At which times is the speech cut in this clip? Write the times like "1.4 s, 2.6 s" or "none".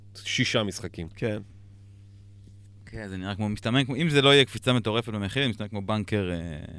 none